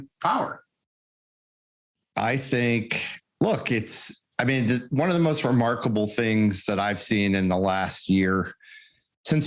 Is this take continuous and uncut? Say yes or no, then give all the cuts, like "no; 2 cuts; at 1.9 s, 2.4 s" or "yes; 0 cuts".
no; 1 cut; at 4.3 s